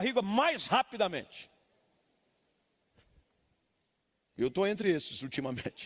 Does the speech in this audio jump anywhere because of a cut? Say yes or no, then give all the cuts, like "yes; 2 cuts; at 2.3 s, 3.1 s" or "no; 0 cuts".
no; 0 cuts